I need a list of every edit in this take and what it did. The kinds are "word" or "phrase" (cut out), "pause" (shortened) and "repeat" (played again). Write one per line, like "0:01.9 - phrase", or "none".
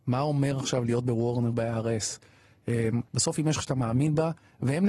0:01.5 - word
0:03.1 - pause
0:03.6 - word